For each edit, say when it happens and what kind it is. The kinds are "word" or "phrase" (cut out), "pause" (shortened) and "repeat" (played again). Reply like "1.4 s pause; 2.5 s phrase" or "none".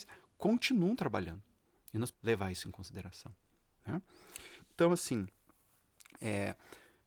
2.1 s word